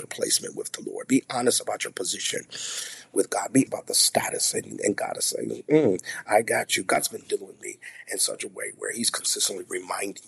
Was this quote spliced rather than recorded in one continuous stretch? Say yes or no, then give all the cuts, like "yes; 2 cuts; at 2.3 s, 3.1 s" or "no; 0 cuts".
yes; 1 cut; at 3.7 s